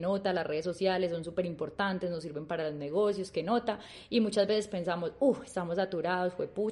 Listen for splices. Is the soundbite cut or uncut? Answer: uncut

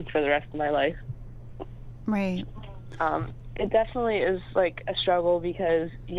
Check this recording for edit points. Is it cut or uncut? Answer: uncut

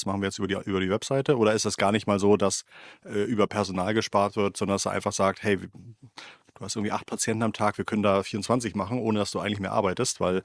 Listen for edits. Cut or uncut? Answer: uncut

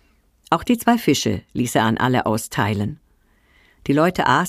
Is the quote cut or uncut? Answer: uncut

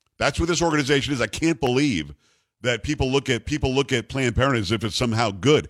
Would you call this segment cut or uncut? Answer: cut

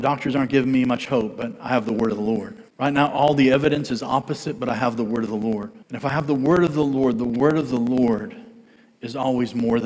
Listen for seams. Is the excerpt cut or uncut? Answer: cut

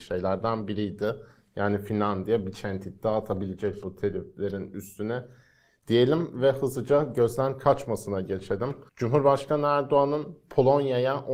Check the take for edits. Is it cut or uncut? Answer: cut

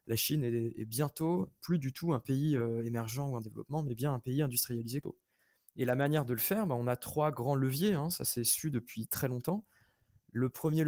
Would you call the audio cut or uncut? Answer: uncut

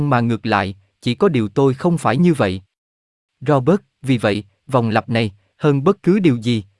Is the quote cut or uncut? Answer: uncut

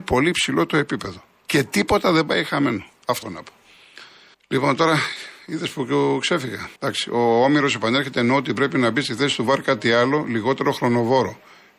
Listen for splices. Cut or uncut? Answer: cut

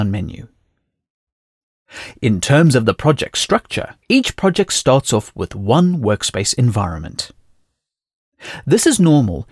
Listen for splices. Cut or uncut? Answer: cut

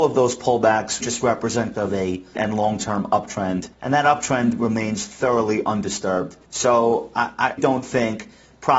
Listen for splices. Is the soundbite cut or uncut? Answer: cut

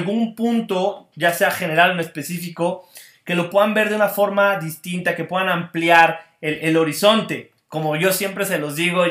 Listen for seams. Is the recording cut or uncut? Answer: uncut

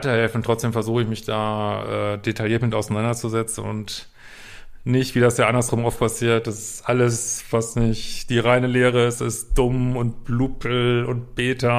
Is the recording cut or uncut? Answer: uncut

